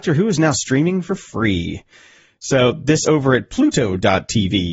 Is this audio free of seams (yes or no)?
no